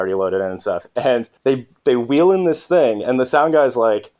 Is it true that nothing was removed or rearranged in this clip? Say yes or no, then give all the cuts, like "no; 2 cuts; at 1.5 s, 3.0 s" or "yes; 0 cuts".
no; 1 cut; at 1.4 s